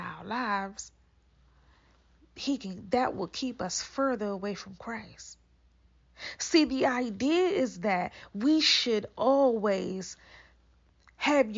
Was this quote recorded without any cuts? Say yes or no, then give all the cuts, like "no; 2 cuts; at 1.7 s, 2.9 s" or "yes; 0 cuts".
yes; 0 cuts